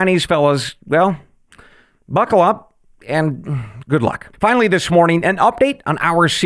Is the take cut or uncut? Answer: cut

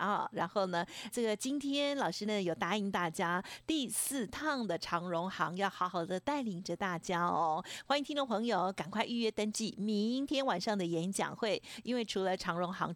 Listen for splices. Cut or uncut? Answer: cut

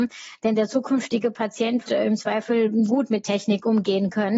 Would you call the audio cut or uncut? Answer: cut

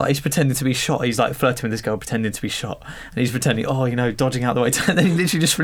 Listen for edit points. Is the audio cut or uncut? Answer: uncut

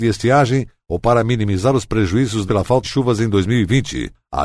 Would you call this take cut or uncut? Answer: cut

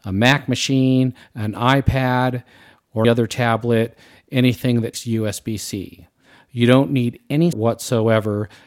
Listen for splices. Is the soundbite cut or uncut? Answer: cut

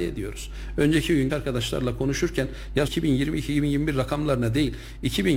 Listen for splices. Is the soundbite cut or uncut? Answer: cut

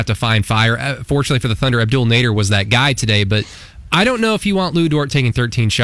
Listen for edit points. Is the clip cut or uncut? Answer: uncut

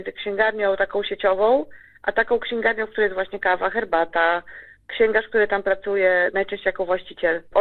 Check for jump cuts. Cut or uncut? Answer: uncut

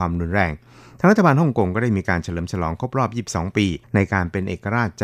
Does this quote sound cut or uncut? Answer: cut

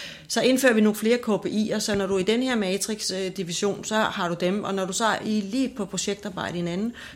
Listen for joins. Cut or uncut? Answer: uncut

